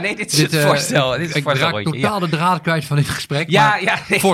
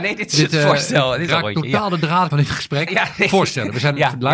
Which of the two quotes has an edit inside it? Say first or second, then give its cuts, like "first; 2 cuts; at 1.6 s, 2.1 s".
second; 3 cuts; at 1.3 s, 2.3 s, 2.9 s